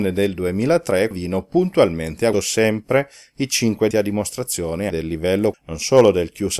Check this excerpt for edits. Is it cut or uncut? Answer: cut